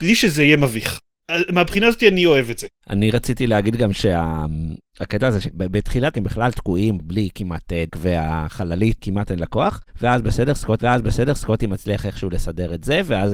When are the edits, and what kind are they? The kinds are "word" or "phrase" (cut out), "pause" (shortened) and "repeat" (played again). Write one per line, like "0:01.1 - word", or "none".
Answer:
0:05.4 - phrase
0:06.1 - word
0:07.9 - word
0:10.8 - repeat

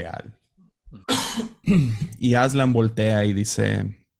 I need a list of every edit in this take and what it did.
0:01.0 - pause

